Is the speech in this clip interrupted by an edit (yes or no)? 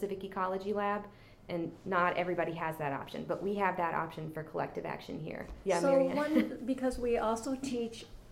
no